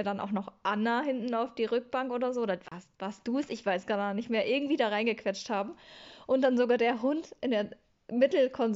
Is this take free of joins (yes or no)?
yes